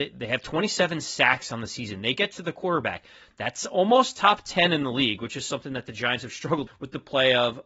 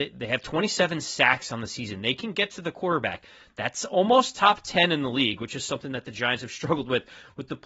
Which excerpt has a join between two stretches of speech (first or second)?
first